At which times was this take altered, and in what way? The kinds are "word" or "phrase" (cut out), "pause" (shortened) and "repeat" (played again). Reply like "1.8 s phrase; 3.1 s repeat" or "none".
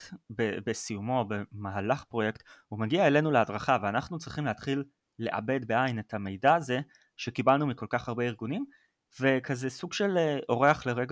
none